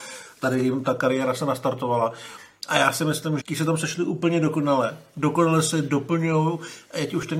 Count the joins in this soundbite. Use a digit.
1